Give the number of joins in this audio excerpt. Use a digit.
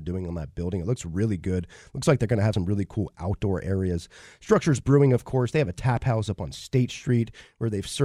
0